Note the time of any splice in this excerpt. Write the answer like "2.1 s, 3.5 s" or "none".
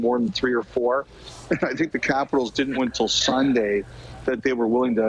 2.7 s